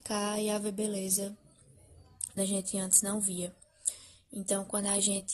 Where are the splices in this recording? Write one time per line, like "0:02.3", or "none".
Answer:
0:02.4

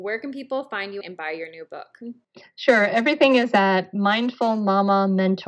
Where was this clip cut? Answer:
0:01.0

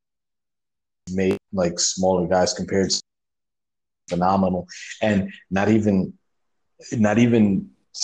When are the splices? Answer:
none

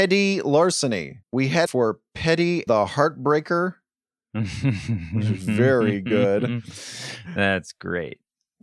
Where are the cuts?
0:01.2
0:01.7
0:02.7

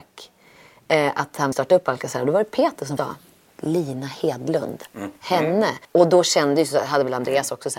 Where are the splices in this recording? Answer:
0:01.5
0:03.0
0:05.8

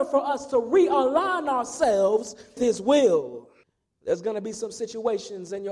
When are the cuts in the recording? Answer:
0:02.6
0:03.6

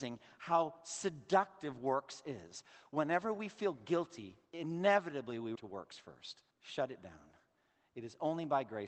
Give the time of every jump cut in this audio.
0:04.5
0:05.6
0:06.5

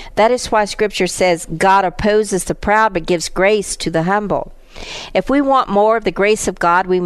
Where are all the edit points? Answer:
none

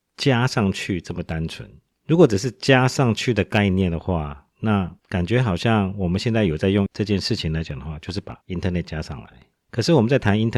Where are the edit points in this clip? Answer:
0:01.9
0:05.0
0:06.9
0:08.4
0:09.5

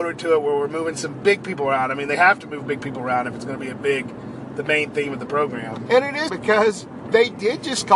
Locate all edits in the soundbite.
0:06.3

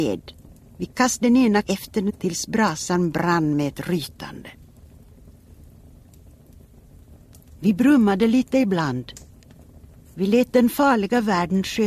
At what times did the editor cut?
0:01.2
0:01.6
0:02.1

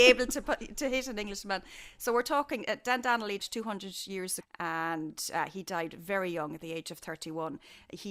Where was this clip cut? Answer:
0:03.4
0:04.4

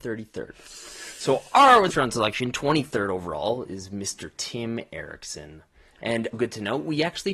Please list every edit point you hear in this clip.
0:01.9
0:06.3

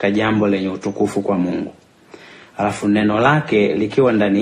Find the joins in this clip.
none

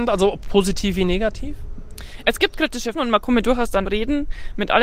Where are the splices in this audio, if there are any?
0:02.9
0:03.4
0:03.8

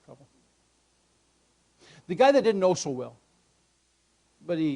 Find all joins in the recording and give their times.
none

